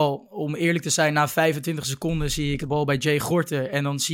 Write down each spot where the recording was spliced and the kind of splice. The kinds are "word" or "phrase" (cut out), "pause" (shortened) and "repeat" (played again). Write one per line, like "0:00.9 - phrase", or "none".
0:02.6 - word